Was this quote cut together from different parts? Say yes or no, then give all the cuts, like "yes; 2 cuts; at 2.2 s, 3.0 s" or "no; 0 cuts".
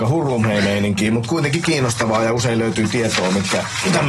no; 0 cuts